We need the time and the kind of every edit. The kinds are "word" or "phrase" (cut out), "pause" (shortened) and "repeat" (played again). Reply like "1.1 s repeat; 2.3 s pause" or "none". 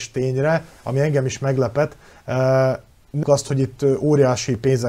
3.2 s word